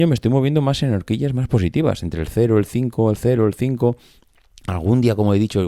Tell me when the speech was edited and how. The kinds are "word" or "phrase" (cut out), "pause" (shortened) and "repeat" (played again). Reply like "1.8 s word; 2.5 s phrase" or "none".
none